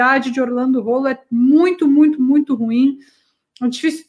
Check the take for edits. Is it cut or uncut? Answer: uncut